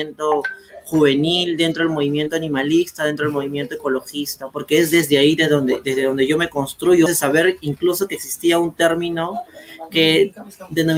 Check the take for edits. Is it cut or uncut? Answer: cut